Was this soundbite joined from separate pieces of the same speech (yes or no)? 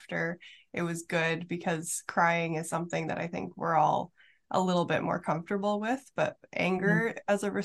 no